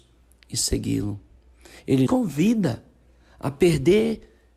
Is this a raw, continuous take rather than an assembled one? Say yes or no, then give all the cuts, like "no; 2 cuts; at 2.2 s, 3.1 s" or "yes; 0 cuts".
no; 1 cut; at 2.1 s